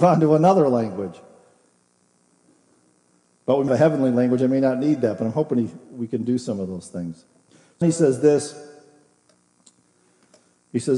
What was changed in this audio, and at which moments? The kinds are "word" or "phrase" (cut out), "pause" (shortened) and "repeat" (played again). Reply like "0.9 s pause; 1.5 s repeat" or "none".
3.7 s word; 7.8 s word

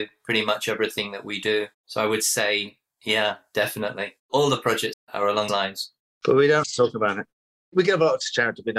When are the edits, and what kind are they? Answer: 1.7 s pause; 4.2 s pause; 4.9 s phrase; 5.5 s word; 6.0 s pause; 6.6 s word

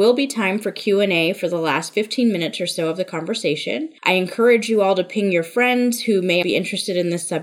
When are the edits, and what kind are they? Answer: 6.4 s word

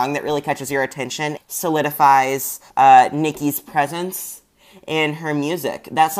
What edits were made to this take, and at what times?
1.4 s word; 2.7 s pause

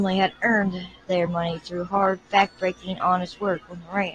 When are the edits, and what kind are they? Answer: none

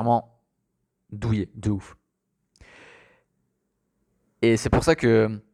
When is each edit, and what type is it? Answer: none

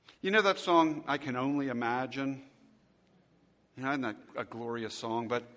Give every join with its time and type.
none

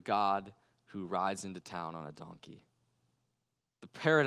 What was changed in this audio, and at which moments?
none

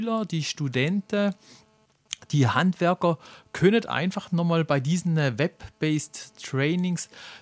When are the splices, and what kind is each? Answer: none

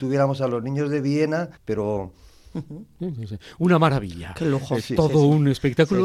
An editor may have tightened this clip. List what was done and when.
1.5 s pause

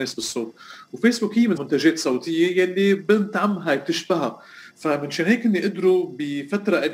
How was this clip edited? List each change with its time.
1.6 s phrase

